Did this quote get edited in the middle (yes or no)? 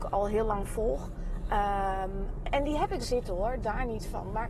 yes